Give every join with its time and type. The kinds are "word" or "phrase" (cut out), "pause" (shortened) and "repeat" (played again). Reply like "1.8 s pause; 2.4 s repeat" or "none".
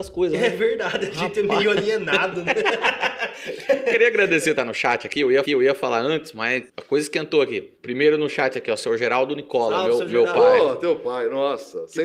4.6 s phrase; 5.5 s repeat; 6.7 s pause; 7.8 s pause

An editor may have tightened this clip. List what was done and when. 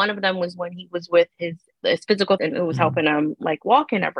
1.7 s word; 2.4 s word

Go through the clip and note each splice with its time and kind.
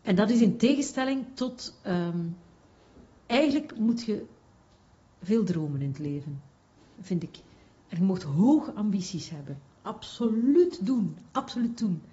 none

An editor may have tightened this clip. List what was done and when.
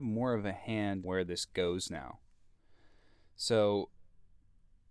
1.0 s word

